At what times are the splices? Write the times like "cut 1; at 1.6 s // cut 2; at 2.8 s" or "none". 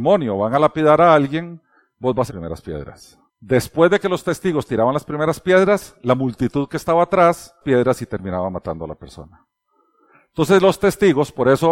cut 1; at 2.3 s // cut 2; at 3.3 s // cut 3; at 7.6 s